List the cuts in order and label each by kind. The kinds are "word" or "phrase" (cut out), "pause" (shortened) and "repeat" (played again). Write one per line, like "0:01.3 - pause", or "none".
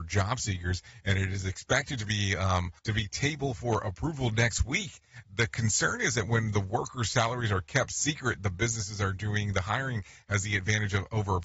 0:02.8 - pause